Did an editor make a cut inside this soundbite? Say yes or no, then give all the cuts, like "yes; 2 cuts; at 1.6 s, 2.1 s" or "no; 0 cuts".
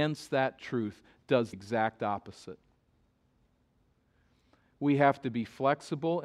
yes; 1 cut; at 1.5 s